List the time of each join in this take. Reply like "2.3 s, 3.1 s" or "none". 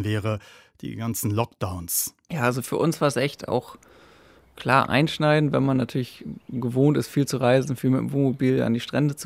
none